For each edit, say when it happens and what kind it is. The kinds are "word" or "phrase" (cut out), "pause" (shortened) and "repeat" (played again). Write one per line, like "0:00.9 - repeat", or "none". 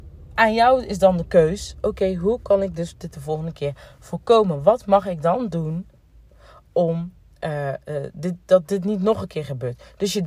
none